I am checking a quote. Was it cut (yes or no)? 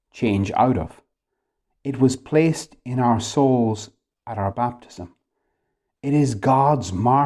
no